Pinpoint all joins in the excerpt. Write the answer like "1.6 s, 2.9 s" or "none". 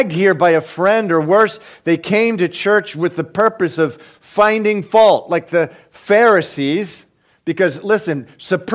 none